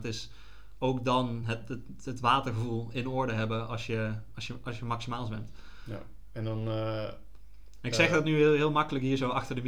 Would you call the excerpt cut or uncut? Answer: uncut